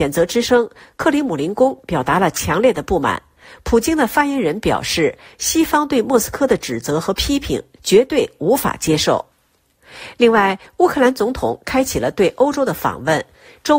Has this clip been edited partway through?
no; 0 cuts

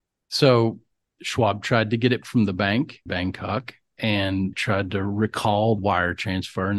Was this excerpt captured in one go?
no; 4 cuts; at 2.2 s, 3.1 s, 4.5 s, 5.8 s

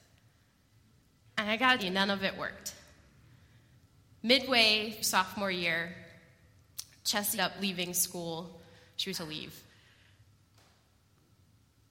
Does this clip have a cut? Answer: yes; 4 cuts; at 1.8 s, 5.0 s, 7.4 s, 9.1 s

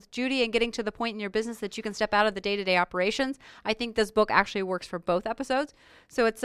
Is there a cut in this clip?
no; 0 cuts

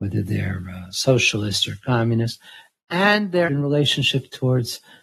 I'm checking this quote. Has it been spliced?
yes; 1 cut; at 3.5 s

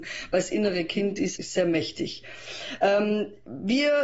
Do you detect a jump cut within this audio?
yes; 1 cut; at 1.4 s

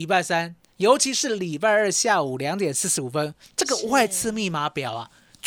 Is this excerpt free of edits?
yes; 0 cuts

